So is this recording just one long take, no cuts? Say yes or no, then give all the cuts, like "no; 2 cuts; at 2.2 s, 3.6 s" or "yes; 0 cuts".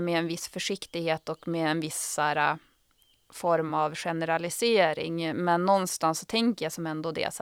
yes; 0 cuts